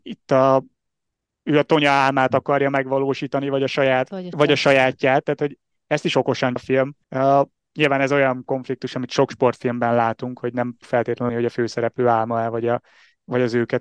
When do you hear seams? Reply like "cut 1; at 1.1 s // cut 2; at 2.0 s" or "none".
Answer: cut 1; at 4.3 s // cut 2; at 6.6 s // cut 3; at 7.0 s // cut 4; at 10.8 s // cut 5; at 11.3 s